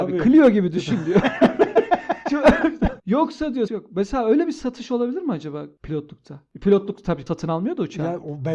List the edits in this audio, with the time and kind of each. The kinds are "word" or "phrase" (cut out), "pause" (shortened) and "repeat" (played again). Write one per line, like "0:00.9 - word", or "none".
0:03.0 - pause
0:03.7 - word
0:07.3 - word